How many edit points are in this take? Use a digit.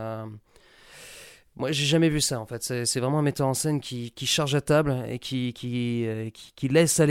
0